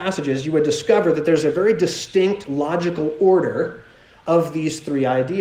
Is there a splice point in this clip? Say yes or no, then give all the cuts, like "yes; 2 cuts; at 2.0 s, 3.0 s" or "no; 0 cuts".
no; 0 cuts